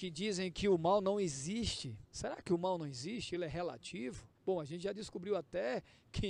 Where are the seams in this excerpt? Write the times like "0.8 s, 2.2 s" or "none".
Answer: 2.0 s, 4.4 s